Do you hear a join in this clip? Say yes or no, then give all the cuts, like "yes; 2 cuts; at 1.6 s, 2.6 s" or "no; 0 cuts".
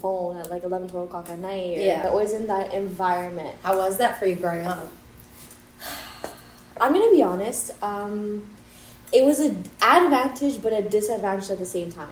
no; 0 cuts